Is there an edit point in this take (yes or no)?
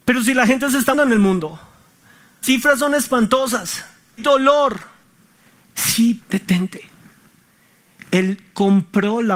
yes